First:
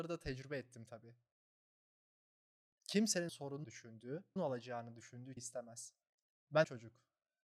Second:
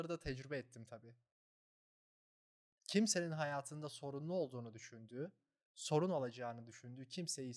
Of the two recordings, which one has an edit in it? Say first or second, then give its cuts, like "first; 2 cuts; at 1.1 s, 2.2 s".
first; 5 cuts; at 3.3 s, 3.6 s, 4.4 s, 5.4 s, 6.6 s